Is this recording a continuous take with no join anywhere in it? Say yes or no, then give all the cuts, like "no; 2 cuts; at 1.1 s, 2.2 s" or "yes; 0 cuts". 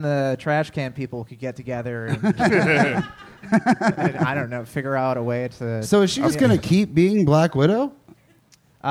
yes; 0 cuts